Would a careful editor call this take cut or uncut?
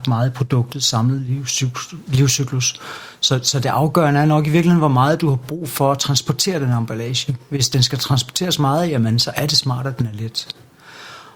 uncut